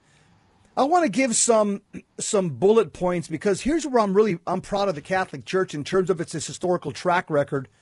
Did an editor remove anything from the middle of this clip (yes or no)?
no